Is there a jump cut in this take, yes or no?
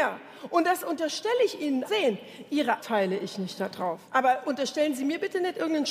yes